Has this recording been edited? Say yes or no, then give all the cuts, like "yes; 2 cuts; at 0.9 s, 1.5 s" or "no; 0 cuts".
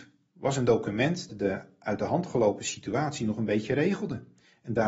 yes; 1 cut; at 1.3 s